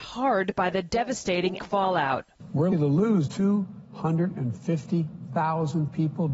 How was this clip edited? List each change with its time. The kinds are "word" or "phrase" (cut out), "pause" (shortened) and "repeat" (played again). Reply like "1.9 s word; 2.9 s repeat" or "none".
1.6 s word; 2.7 s word; 3.3 s word